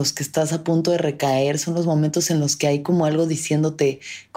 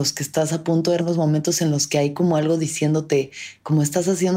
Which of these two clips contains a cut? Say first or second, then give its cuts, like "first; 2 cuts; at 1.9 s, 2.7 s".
second; 1 cut; at 1.0 s